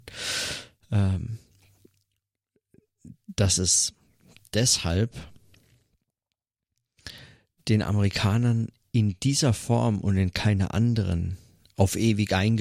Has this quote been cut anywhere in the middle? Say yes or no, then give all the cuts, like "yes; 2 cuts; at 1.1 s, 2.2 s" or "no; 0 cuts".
no; 0 cuts